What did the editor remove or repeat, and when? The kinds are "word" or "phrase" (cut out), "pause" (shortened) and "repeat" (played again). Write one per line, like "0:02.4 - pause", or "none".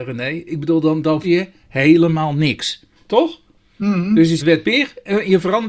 0:01.2 - word
0:04.4 - word